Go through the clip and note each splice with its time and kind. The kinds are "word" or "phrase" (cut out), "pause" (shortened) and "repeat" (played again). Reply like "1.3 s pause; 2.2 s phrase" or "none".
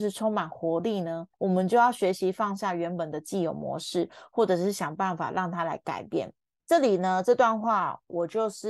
1.3 s pause